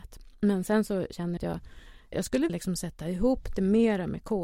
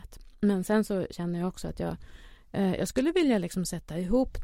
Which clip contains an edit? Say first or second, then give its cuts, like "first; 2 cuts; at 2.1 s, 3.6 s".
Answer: first; 3 cuts; at 1.4 s, 2.1 s, 2.5 s